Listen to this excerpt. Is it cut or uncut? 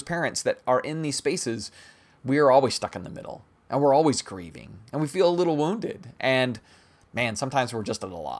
uncut